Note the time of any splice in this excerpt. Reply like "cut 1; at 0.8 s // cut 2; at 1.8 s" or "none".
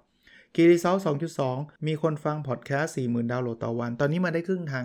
cut 1; at 1.8 s